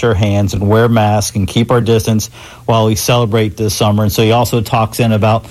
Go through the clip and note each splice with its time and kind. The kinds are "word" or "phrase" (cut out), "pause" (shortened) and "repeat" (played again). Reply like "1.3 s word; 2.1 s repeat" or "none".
none